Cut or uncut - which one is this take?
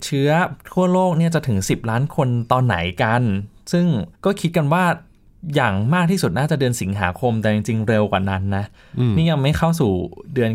cut